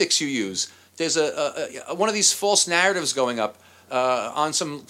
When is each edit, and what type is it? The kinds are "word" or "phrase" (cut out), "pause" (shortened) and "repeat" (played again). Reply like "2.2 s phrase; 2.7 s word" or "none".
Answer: none